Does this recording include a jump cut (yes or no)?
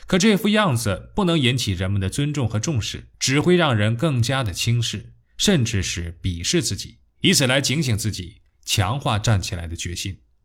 yes